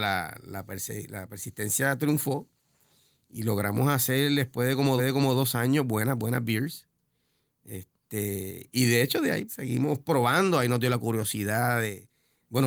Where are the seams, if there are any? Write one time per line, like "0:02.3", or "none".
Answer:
0:05.0
0:09.5